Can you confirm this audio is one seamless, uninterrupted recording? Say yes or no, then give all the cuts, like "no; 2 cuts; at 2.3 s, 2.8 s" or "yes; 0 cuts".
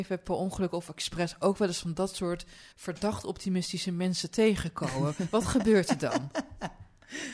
no; 1 cut; at 2.7 s